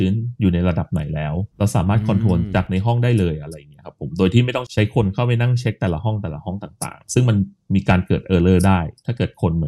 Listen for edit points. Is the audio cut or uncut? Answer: cut